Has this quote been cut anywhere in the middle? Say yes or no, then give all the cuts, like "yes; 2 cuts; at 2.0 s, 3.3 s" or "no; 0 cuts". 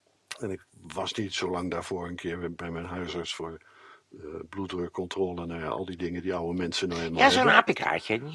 no; 0 cuts